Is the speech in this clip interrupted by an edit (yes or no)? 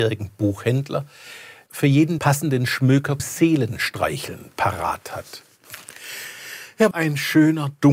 yes